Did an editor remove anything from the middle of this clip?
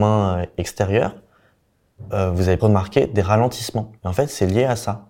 yes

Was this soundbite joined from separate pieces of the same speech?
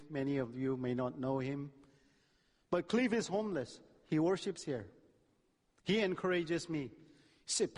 no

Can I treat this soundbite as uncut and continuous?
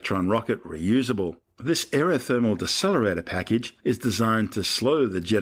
no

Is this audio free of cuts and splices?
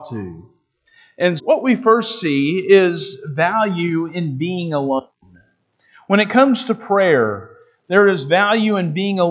no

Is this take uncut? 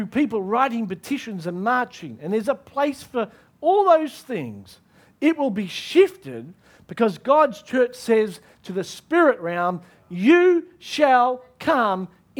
yes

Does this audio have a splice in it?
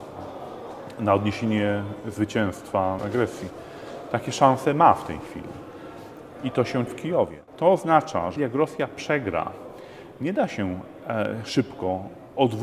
yes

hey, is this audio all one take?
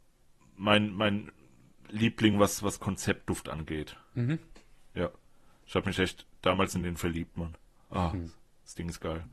yes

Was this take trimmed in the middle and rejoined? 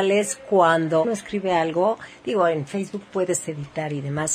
yes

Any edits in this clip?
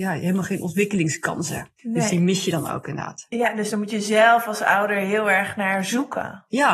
yes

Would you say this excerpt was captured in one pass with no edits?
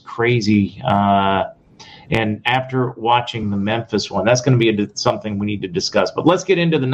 yes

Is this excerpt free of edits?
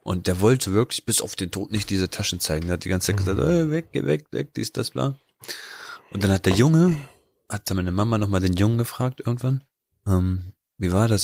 yes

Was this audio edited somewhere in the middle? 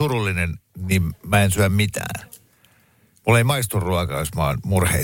no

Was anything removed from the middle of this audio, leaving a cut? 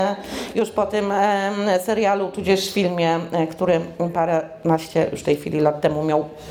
no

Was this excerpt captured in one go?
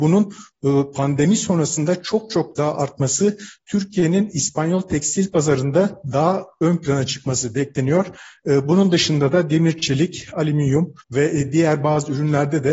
no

